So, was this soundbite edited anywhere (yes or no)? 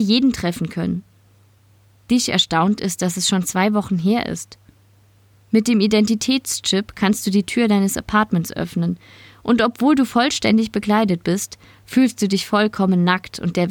yes